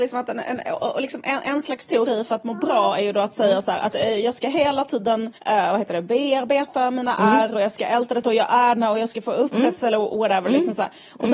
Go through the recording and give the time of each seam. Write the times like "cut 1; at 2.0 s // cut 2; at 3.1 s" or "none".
cut 1; at 5.4 s

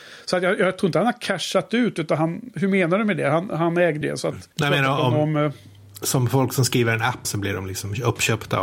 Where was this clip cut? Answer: cut 1; at 2.5 s // cut 2; at 4.0 s // cut 3; at 4.5 s // cut 4; at 7.2 s

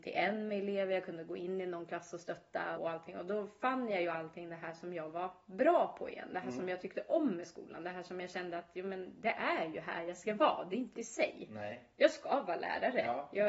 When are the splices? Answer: cut 1; at 2.7 s // cut 2; at 10.9 s

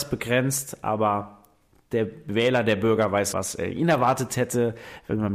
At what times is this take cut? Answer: cut 1; at 3.3 s

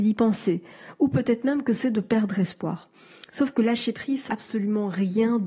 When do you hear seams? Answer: cut 1; at 4.3 s

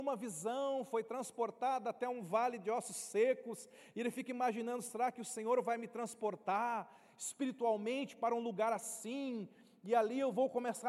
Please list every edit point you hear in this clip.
none

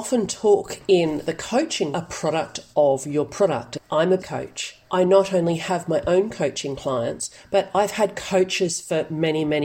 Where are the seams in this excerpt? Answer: cut 1; at 1.9 s // cut 2; at 4.2 s // cut 3; at 4.8 s

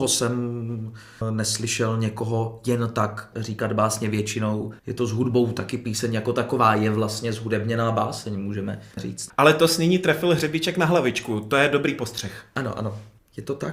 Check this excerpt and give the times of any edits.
cut 1; at 3.3 s // cut 2; at 4.8 s // cut 3; at 8.9 s

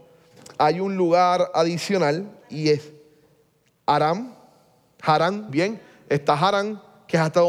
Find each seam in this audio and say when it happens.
cut 1; at 5.5 s

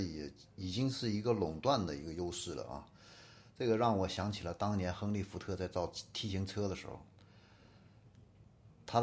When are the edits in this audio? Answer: none

